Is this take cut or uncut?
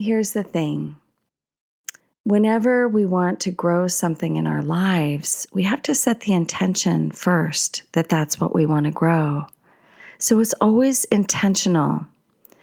cut